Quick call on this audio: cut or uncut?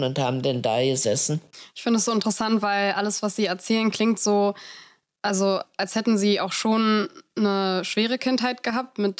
uncut